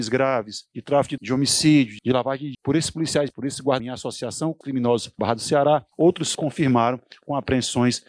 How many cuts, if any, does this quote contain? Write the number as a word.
eight